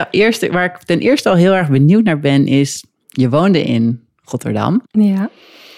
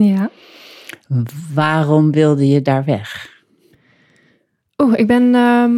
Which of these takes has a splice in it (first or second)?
first